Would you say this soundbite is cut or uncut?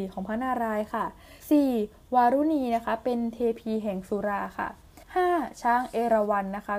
cut